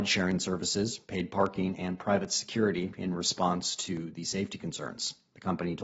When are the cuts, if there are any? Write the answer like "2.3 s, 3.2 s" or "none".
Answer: none